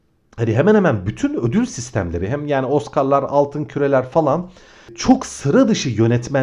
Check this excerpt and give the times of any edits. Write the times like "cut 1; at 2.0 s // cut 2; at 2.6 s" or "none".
none